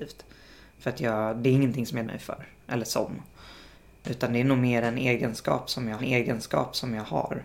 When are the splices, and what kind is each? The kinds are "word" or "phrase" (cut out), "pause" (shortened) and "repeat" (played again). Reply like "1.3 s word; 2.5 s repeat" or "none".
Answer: 2.0 s word; 6.0 s repeat